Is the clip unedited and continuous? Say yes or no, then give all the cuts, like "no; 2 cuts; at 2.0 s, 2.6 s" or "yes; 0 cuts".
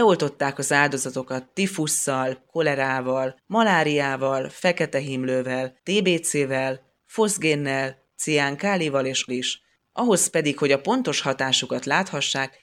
no; 4 cuts; at 2.5 s, 3.4 s, 5.8 s, 9.3 s